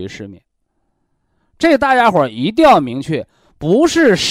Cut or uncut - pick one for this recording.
uncut